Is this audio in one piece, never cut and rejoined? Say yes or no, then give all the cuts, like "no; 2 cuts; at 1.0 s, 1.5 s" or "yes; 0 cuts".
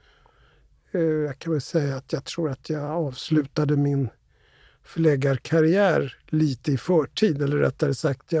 yes; 0 cuts